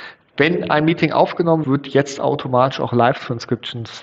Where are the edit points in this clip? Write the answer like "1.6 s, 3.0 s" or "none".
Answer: 1.6 s